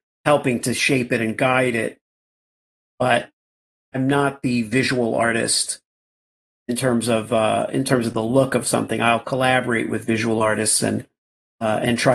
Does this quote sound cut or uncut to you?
uncut